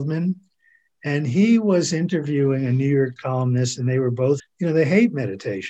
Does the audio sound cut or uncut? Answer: cut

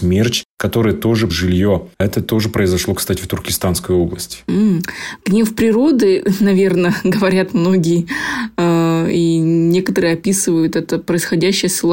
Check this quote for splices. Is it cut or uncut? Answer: cut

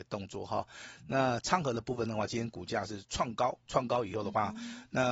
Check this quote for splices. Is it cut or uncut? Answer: cut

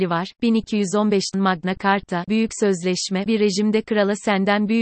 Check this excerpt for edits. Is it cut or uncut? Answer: cut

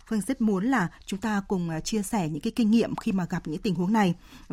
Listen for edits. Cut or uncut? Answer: uncut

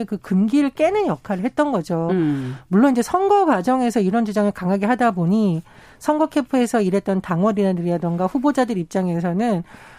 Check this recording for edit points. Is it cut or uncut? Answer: uncut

